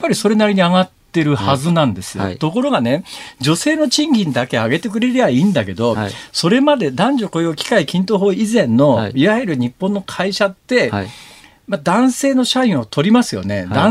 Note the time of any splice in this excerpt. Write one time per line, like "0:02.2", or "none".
none